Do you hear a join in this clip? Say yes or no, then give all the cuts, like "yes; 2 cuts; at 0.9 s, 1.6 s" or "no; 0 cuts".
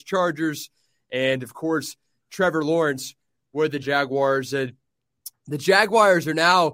yes; 1 cut; at 3.8 s